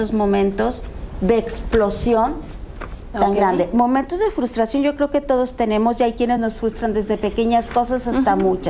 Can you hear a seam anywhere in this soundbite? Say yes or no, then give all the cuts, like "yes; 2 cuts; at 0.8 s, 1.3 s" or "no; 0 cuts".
no; 0 cuts